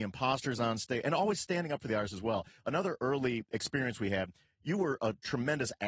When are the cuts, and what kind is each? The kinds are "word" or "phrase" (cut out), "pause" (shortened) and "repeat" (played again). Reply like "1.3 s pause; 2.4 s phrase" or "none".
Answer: none